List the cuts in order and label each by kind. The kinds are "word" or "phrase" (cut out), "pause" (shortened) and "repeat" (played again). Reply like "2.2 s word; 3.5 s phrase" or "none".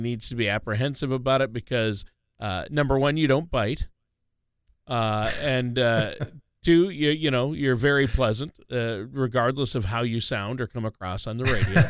none